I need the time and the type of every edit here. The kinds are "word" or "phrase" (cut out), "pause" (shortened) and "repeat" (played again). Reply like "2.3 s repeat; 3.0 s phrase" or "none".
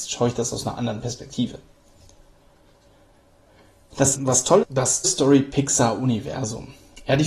4.2 s word; 4.6 s word; 5.0 s word